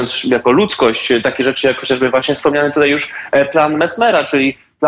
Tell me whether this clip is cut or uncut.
uncut